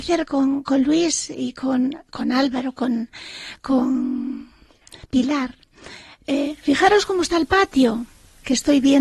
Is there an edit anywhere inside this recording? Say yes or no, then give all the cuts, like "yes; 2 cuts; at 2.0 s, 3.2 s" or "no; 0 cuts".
no; 0 cuts